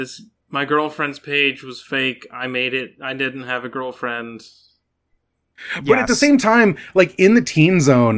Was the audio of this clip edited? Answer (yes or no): no